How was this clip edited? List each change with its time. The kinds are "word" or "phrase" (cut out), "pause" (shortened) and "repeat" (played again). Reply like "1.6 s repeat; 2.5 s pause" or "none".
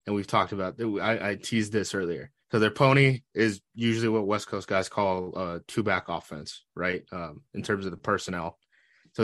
2.4 s pause